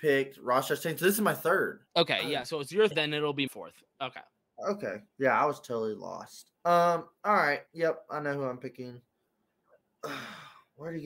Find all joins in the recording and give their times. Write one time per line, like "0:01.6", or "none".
0:01.9
0:02.9
0:03.5
0:05.1
0:06.6
0:07.7

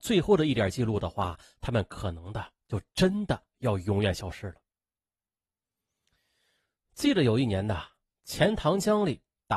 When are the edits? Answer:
none

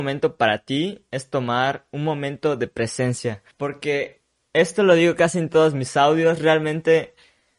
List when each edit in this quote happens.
0:03.5

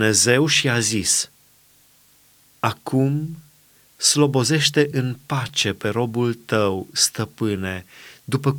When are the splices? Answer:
none

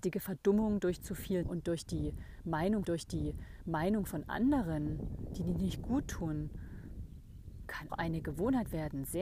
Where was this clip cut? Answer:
0:01.4
0:02.8
0:07.9

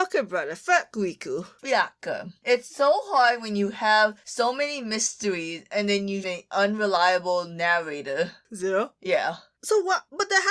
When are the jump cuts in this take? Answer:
0:06.2

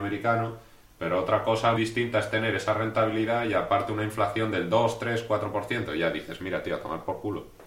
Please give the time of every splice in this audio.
0:01.8

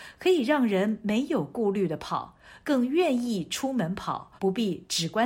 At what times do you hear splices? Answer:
0:04.4

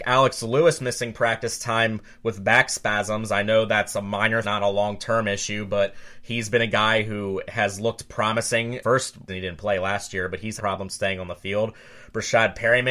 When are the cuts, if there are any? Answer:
0:04.4
0:09.3
0:10.6

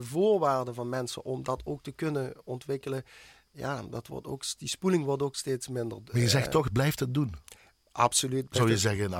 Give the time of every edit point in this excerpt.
none

